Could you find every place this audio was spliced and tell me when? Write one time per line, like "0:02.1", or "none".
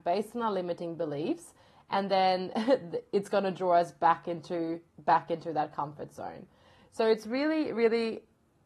none

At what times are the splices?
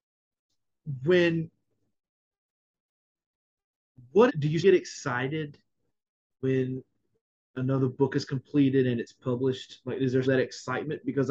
0:04.3
0:04.6
0:10.2

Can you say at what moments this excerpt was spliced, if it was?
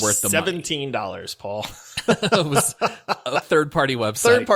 0:03.4

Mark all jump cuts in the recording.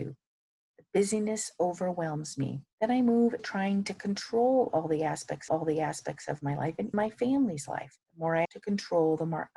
0:02.7
0:03.4
0:05.5
0:06.9
0:08.0
0:08.4

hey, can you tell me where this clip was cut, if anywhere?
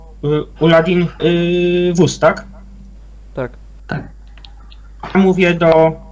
0:01.2
0:05.1

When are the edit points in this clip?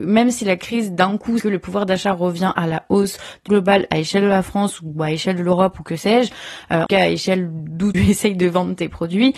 0:01.4
0:03.5
0:06.9
0:07.9

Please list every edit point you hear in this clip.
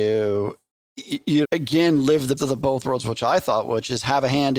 0:01.4
0:02.4

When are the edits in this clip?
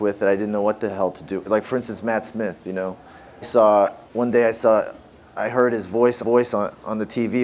0:03.4
0:04.0
0:06.2

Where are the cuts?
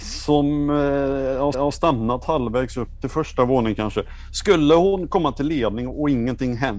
0:01.5

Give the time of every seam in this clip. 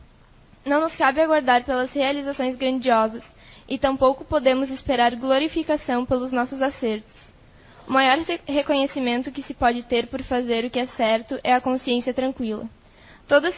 none

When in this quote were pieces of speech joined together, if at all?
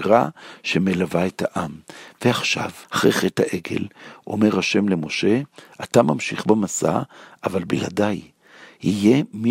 0:02.8

